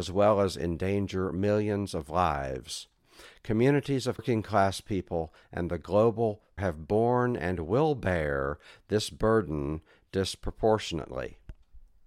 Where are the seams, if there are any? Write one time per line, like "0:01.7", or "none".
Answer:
0:04.2
0:06.6